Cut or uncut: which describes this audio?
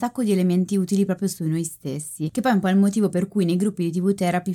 uncut